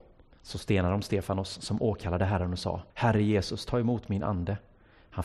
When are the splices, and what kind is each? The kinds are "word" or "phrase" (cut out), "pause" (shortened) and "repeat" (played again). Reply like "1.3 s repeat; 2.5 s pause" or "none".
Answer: 2.9 s pause